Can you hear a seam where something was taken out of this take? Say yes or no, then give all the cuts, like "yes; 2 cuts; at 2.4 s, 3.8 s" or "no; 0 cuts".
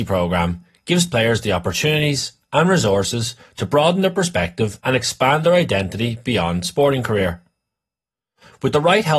yes; 1 cut; at 4.8 s